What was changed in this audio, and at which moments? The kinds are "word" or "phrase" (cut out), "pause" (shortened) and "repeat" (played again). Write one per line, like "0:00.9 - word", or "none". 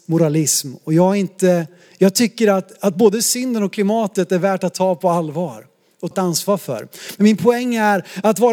0:06.1 - word